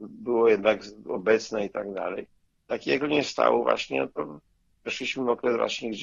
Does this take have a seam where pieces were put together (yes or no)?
no